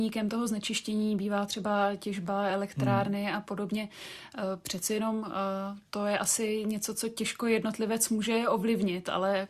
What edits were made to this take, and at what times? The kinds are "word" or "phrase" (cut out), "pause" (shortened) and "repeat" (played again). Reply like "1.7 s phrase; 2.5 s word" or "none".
none